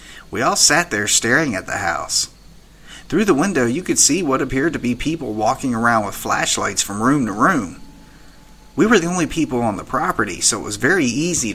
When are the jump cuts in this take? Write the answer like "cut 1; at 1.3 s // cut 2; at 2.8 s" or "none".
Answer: none